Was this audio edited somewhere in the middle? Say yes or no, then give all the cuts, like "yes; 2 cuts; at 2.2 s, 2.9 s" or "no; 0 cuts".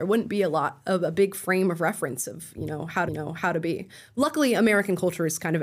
yes; 1 cut; at 3.1 s